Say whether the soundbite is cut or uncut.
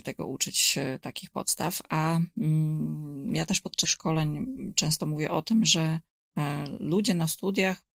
cut